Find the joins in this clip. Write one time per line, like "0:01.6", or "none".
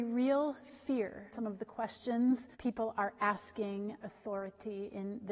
0:01.3
0:02.5
0:04.0